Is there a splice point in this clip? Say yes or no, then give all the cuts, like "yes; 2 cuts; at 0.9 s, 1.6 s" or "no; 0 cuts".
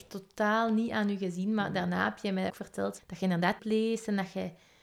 yes; 3 cuts; at 2.5 s, 3.0 s, 3.6 s